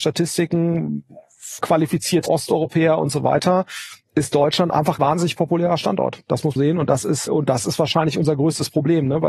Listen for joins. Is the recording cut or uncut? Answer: cut